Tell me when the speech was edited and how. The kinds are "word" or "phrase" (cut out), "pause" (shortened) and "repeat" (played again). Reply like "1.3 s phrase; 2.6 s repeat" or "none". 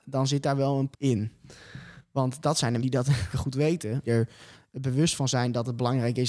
0.9 s word; 2.8 s word; 3.3 s word; 4.0 s word